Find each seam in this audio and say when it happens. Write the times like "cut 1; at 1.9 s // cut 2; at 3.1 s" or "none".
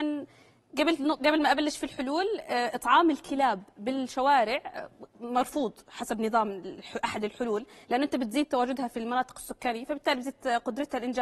none